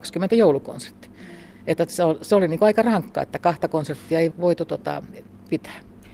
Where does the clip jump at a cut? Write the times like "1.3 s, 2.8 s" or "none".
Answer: 4.3 s